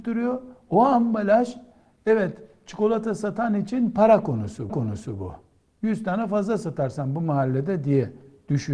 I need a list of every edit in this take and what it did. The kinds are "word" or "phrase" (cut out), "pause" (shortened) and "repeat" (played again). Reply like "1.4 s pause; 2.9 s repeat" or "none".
4.7 s repeat

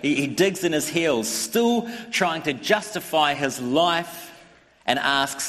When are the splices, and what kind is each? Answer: none

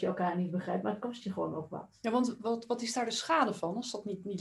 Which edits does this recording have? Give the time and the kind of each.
none

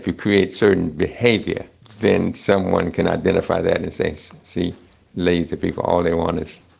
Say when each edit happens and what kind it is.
none

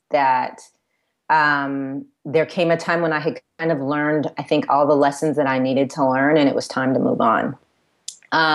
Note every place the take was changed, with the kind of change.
none

